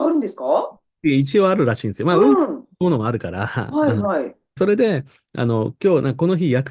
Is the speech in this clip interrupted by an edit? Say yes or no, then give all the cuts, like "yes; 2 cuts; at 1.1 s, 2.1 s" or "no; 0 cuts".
yes; 1 cut; at 4.6 s